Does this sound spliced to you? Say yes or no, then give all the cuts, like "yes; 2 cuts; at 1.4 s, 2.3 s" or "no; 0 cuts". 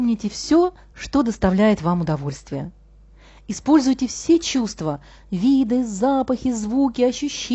no; 0 cuts